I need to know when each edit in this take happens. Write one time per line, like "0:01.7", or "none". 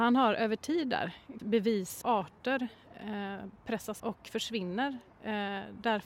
0:01.4
0:02.0
0:04.0